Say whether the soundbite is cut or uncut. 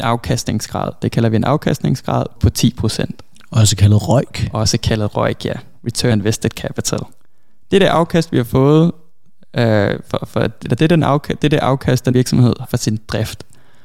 cut